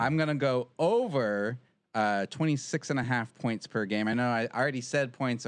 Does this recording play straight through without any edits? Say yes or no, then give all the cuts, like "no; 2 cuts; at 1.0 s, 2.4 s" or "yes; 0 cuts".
yes; 0 cuts